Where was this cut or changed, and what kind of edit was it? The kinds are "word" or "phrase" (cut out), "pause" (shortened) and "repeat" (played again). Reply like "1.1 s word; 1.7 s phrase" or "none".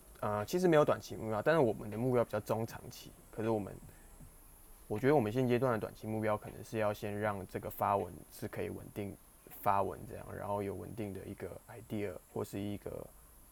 12.2 s pause